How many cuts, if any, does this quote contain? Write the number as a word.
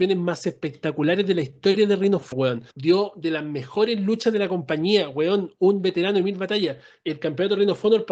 two